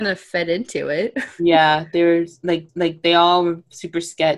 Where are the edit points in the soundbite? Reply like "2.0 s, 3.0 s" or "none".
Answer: 2.7 s